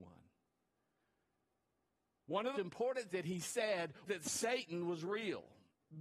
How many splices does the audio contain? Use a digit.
3